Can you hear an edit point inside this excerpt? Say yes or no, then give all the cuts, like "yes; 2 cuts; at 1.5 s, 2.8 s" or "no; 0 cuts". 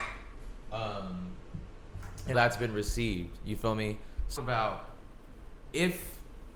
yes; 2 cuts; at 2.3 s, 4.4 s